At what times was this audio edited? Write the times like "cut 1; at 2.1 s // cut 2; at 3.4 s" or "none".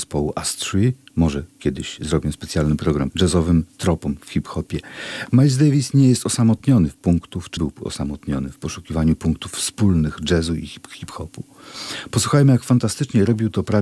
cut 1; at 3.1 s // cut 2; at 7.0 s // cut 3; at 7.6 s